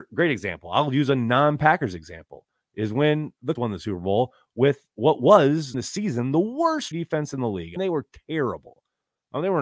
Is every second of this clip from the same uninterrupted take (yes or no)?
no